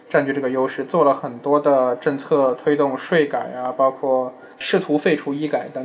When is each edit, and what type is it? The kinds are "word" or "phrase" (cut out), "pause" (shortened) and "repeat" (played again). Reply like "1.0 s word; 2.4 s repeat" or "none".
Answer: 4.5 s pause